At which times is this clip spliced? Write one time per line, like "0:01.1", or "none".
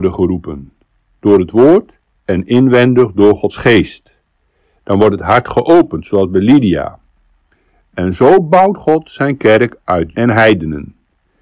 0:10.1